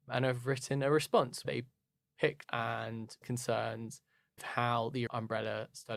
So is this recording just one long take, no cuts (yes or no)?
no